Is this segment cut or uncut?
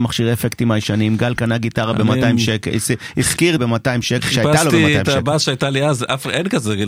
cut